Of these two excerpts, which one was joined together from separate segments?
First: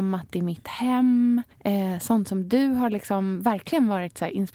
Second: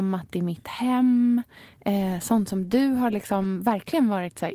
first; 1 cut; at 1.5 s

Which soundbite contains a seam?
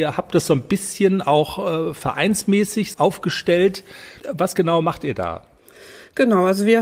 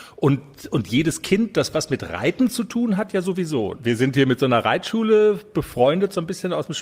first; 2 cuts; at 2.9 s, 4.2 s

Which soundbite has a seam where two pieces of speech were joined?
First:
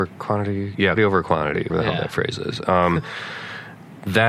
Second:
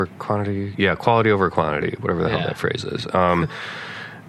first; 2 cuts; at 1.0 s, 1.7 s

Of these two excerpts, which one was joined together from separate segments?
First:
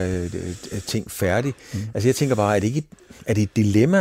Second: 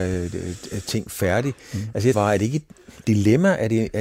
second; 2 cuts; at 2.1 s, 3.0 s

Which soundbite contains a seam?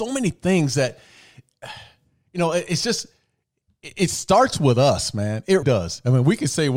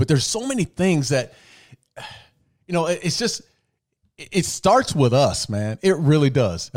first; 1 cut; at 5.6 s

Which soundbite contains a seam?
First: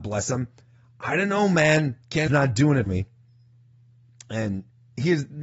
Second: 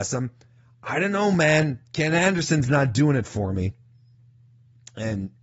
first; 2 cuts; at 2.3 s, 2.9 s

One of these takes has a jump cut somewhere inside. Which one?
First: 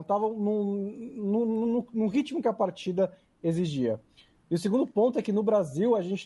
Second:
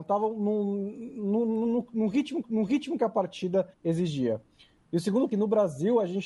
second; 3 cuts; at 2.4 s, 3.7 s, 5.3 s

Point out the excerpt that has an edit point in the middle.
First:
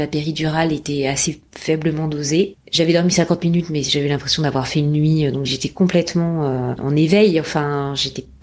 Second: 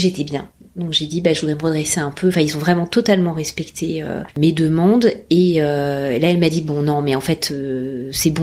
first; 2 cuts; at 5.5 s, 6.8 s

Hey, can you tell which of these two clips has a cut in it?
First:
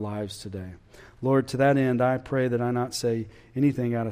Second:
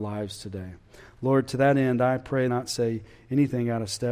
second; 1 cut; at 2.5 s

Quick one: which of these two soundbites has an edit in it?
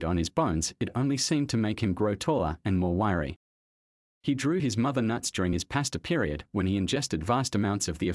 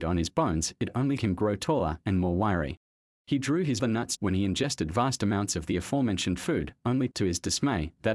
second; 5 cuts; at 1.2 s, 3.0 s, 3.8 s, 4.2 s, 7.1 s

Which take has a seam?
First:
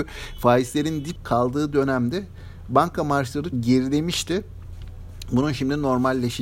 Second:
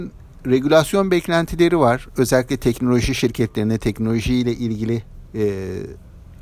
first; 2 cuts; at 1.2 s, 3.5 s

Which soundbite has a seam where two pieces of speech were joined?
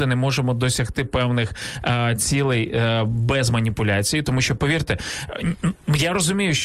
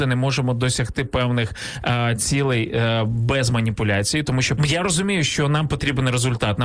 second; 1 cut; at 4.6 s

